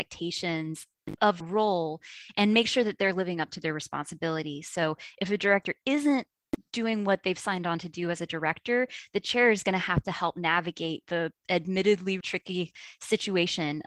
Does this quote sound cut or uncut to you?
cut